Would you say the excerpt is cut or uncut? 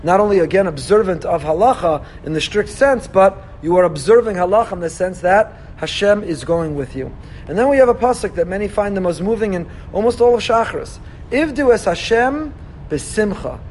uncut